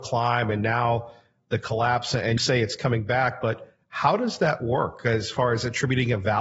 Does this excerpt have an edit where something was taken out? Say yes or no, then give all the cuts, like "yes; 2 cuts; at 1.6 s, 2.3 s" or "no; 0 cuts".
yes; 1 cut; at 2.4 s